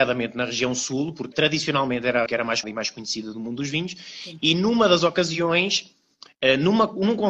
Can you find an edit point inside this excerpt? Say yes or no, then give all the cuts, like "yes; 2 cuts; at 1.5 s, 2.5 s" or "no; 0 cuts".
yes; 3 cuts; at 1.3 s, 2.3 s, 2.6 s